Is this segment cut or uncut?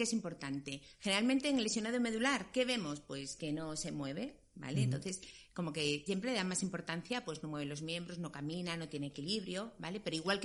cut